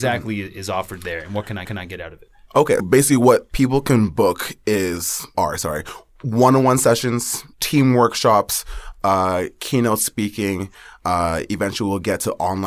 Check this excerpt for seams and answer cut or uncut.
cut